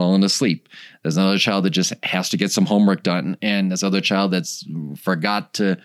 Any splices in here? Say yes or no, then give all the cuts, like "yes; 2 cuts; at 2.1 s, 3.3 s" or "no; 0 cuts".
no; 0 cuts